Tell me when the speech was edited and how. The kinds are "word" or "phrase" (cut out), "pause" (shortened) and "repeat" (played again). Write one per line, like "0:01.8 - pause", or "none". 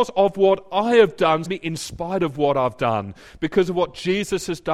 0:01.4 - word